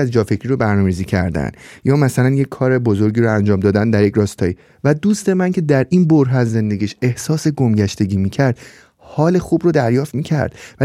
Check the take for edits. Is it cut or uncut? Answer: uncut